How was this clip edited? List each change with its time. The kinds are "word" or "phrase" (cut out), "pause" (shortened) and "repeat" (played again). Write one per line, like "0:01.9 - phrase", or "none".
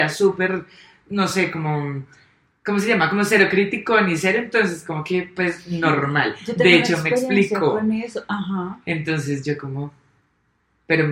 none